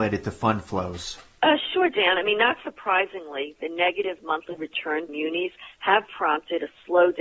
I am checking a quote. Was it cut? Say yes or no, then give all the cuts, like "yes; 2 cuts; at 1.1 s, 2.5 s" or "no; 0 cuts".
yes; 1 cut; at 5.1 s